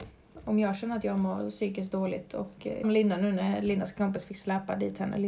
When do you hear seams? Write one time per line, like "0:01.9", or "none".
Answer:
0:02.8